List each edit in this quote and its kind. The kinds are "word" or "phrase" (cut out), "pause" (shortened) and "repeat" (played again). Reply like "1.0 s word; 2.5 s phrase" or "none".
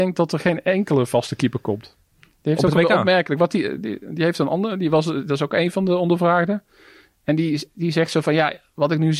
none